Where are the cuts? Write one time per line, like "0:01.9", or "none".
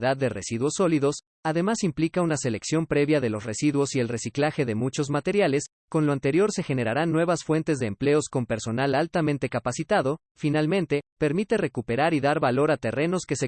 none